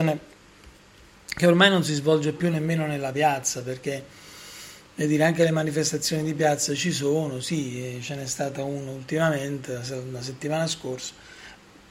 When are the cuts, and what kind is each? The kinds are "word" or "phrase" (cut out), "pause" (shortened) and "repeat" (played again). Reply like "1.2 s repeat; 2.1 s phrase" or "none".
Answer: none